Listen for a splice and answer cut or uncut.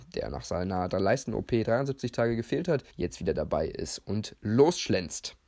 cut